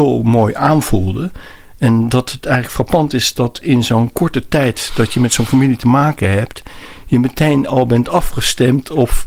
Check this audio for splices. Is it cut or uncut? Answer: uncut